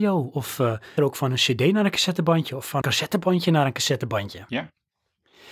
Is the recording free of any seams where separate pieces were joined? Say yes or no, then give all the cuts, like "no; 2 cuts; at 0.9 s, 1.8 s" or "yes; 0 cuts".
no; 2 cuts; at 1.0 s, 2.8 s